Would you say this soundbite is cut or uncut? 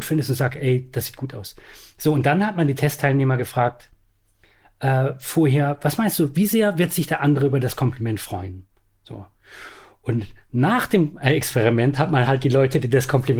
uncut